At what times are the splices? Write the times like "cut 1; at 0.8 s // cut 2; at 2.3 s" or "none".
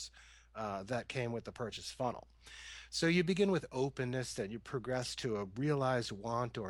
none